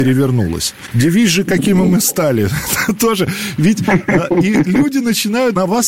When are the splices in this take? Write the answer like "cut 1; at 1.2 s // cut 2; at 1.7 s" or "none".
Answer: none